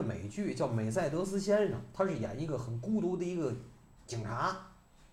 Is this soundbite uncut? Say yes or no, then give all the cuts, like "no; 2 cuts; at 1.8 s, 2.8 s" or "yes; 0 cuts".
yes; 0 cuts